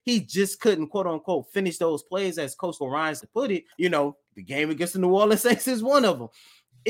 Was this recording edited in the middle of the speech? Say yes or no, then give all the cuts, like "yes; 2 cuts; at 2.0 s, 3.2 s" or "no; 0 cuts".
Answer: yes; 4 cuts; at 2.8 s, 3.2 s, 3.7 s, 4.3 s